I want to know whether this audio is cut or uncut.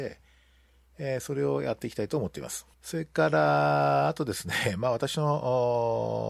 cut